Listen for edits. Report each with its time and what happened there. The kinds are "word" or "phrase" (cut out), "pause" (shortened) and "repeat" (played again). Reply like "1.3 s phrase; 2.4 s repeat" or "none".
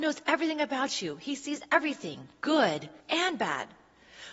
3.0 s pause